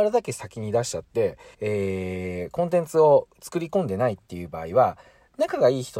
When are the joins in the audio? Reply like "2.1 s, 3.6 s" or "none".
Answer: 1.5 s